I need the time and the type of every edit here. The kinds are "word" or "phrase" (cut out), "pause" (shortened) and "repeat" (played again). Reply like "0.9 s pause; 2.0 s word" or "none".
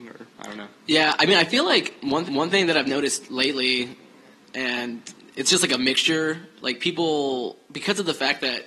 2.3 s repeat